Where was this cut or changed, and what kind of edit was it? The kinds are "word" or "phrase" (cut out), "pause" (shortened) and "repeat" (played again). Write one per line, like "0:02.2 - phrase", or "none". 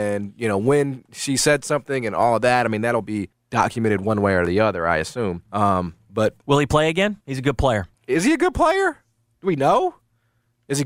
0:03.3 - pause
0:05.5 - pause
0:06.4 - pause
0:07.2 - pause
0:07.9 - pause